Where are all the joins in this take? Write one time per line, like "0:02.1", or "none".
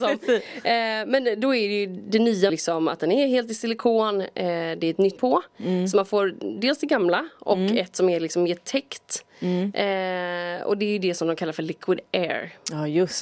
0:02.5
0:05.2